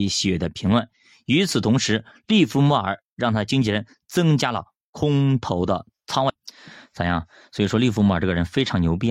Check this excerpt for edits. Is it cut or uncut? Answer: uncut